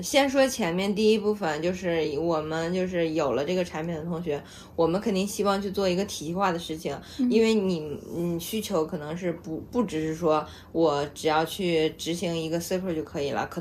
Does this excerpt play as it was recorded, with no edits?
yes; 0 cuts

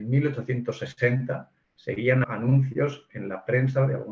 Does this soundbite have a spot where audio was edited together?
yes; 1 cut; at 2.2 s

